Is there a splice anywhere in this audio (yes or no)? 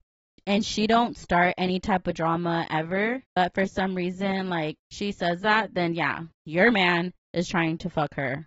yes